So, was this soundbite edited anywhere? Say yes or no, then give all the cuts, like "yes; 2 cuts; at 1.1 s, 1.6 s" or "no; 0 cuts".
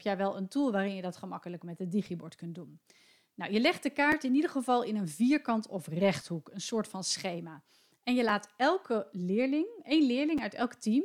no; 0 cuts